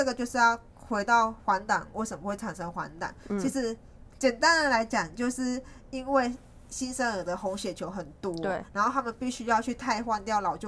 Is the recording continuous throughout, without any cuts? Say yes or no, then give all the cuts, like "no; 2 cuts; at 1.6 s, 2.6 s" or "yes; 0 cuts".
yes; 0 cuts